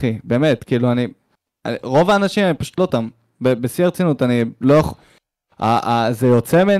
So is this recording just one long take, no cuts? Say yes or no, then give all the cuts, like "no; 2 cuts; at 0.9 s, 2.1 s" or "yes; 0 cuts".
no; 1 cut; at 2.8 s